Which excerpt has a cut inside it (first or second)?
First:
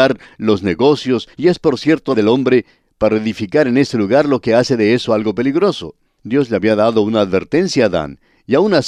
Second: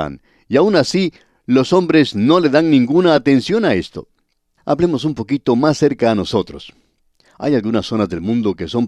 first